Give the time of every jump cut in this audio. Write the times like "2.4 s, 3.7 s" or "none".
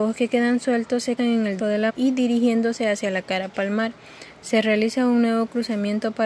1.2 s, 1.6 s, 1.9 s